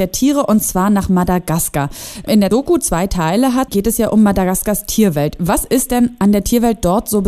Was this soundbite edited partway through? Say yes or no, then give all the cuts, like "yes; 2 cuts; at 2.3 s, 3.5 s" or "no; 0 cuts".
yes; 1 cut; at 3.7 s